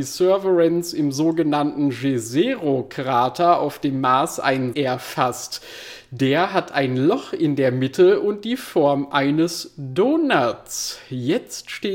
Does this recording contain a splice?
yes; 1 cut; at 4.7 s

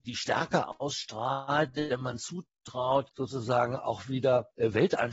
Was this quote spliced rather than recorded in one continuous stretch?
no; 0 cuts

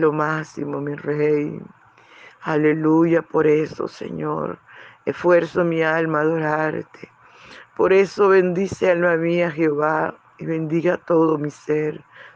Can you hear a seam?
no; 0 cuts

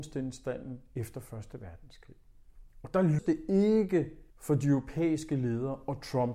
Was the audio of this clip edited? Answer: yes; 2 cuts; at 3.2 s, 4.3 s

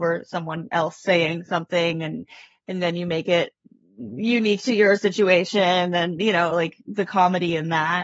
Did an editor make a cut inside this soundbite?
no; 0 cuts

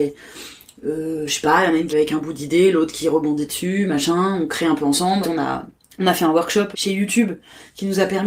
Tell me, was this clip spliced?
yes; 4 cuts; at 1.9 s, 5.2 s, 5.8 s, 6.7 s

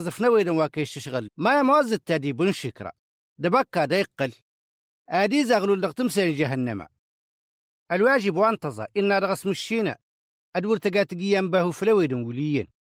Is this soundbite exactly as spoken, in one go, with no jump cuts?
no; 1 cut; at 1.3 s

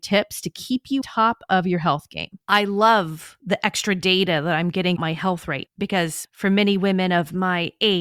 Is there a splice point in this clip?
yes; 3 cuts; at 1.0 s, 5.0 s, 5.7 s

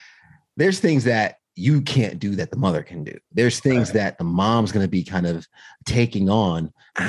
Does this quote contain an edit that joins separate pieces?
no; 0 cuts

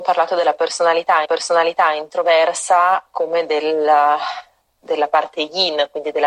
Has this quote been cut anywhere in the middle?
yes; 1 cut; at 1.2 s

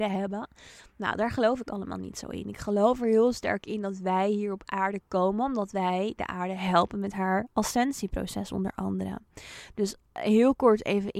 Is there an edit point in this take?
no; 0 cuts

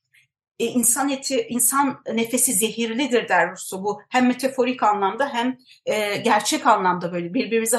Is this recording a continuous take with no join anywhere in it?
yes; 0 cuts

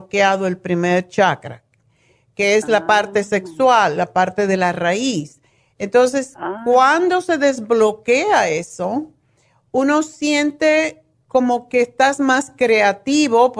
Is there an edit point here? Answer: no; 0 cuts

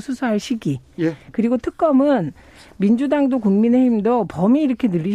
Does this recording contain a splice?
no; 0 cuts

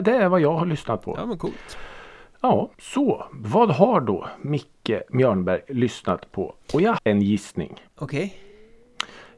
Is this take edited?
yes; 3 cuts; at 2.7 s, 7.0 s, 7.9 s

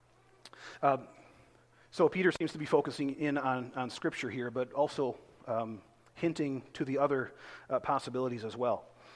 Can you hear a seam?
no; 0 cuts

